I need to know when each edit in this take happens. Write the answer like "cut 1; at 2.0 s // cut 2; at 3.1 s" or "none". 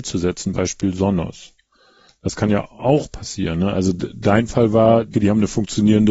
cut 1; at 5.1 s